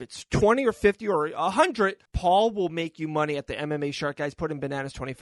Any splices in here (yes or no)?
yes